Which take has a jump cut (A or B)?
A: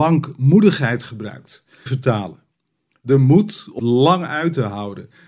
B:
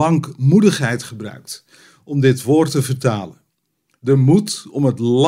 A